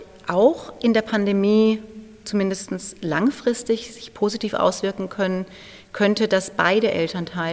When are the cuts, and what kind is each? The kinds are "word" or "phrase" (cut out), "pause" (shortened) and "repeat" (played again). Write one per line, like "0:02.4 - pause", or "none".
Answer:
none